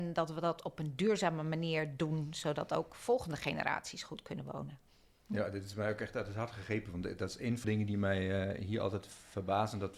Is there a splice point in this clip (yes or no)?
yes